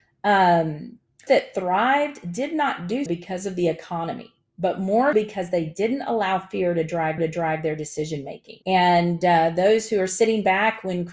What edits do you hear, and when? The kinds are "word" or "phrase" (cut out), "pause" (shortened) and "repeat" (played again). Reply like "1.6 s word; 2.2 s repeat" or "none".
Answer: 1.3 s word; 3.1 s word; 5.1 s word; 7.2 s repeat; 8.6 s pause